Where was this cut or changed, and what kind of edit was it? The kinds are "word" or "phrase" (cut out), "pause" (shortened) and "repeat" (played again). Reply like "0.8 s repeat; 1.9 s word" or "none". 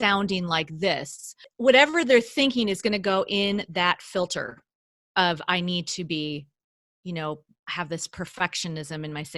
none